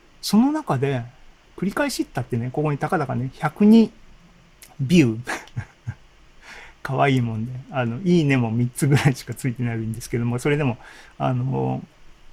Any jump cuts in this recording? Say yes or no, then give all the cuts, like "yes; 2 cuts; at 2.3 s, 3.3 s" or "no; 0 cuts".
yes; 1 cut; at 1.5 s